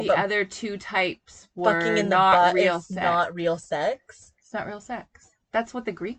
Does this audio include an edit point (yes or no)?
no